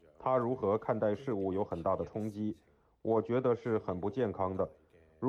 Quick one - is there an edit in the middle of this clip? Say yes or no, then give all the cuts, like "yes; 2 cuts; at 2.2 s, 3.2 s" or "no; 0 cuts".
no; 0 cuts